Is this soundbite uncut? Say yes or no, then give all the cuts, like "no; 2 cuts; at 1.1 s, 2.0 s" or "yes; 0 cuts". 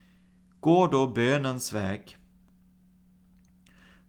yes; 0 cuts